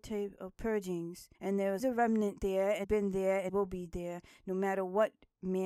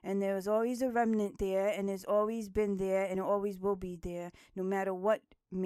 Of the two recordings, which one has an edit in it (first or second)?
first